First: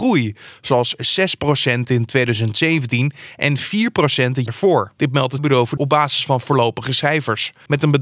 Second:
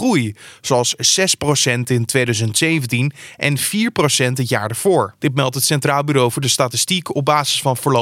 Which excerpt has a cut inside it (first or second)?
first